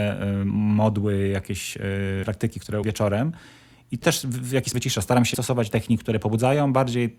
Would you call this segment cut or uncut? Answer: cut